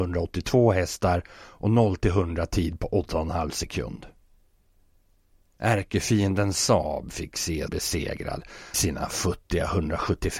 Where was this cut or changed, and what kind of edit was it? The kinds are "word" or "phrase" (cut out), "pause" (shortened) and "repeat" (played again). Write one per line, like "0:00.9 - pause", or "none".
0:07.7 - word
0:08.7 - word